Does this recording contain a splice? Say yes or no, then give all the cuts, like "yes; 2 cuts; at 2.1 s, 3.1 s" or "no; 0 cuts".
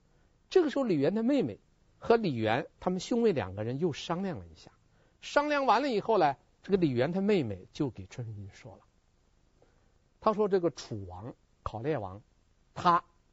no; 0 cuts